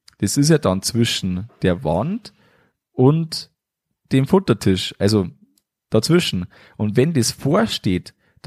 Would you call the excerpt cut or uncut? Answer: uncut